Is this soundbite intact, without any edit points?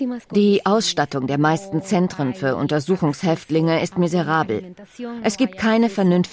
yes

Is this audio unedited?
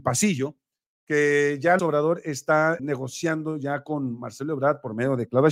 no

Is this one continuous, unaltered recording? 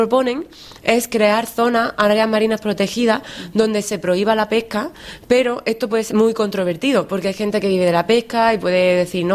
no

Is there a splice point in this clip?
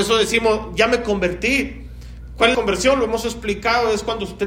yes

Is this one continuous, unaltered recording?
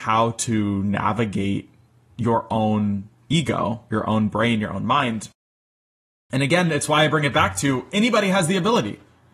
yes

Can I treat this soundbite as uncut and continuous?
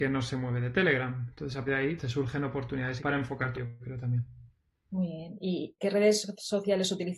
no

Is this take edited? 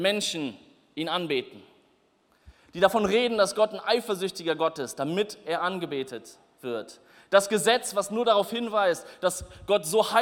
no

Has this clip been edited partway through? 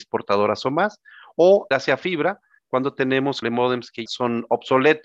yes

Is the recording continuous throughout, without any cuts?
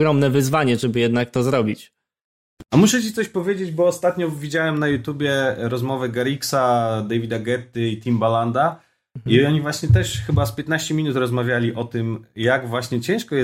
yes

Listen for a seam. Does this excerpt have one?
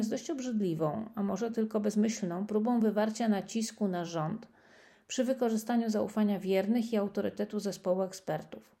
no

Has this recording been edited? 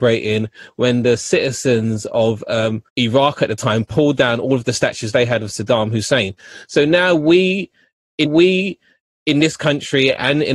yes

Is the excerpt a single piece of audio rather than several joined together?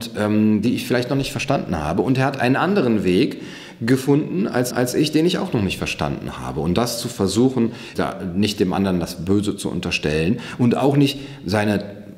no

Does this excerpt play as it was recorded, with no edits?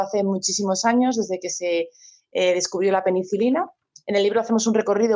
yes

